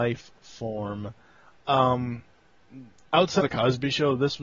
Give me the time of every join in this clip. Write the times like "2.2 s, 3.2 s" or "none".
3.4 s